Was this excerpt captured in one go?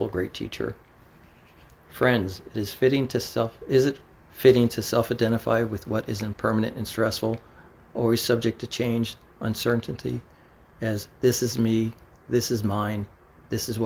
yes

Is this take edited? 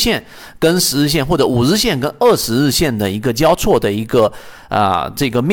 no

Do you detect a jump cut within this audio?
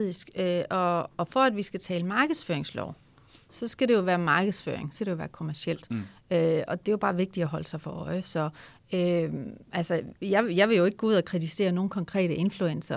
yes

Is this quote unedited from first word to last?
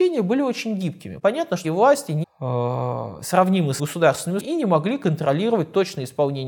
no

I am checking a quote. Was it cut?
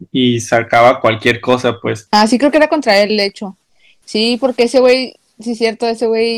no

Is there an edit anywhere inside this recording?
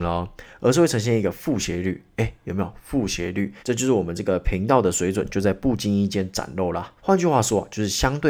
yes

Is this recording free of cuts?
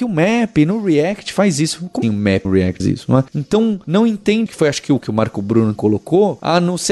no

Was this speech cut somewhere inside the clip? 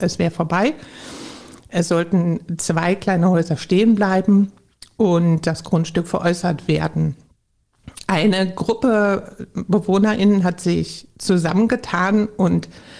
no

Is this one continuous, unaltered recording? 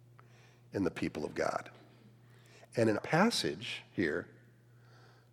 no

